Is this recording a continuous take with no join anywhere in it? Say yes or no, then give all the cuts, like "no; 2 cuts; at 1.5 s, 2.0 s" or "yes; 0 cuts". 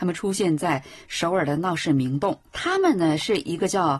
no; 1 cut; at 2.5 s